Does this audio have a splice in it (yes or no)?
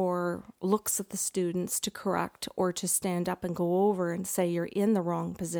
no